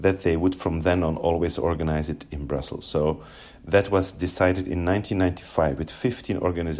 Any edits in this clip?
no; 0 cuts

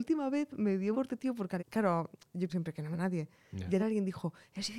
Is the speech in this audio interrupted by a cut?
yes; 5 cuts; at 0.9 s, 1.6 s, 2.5 s, 2.9 s, 3.8 s

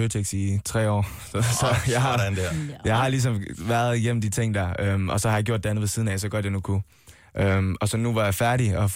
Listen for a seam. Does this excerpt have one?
no; 0 cuts

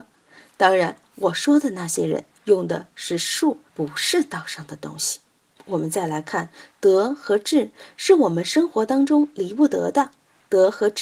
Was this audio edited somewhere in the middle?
yes; 1 cut; at 3.7 s

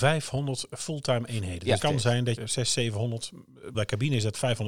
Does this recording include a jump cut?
yes; 3 cuts; at 1.8 s, 2.4 s, 3.7 s

